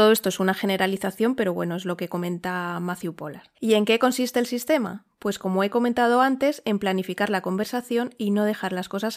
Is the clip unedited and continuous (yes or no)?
no